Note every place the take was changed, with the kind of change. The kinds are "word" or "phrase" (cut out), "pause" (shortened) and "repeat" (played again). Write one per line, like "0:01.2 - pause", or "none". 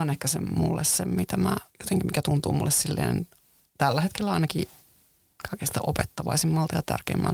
0:01.7 - pause